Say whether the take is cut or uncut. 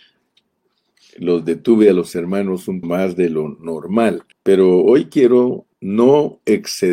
cut